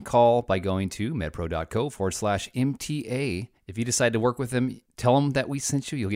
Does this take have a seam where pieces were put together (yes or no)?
no